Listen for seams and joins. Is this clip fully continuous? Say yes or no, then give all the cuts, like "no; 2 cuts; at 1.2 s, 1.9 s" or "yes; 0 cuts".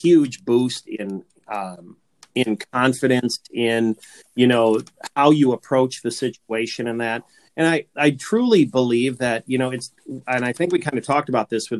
yes; 0 cuts